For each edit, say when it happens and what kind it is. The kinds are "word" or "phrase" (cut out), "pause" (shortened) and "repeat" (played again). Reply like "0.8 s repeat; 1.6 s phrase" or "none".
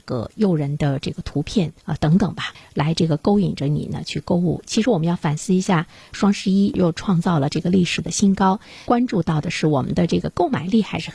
1.8 s pause; 2.5 s phrase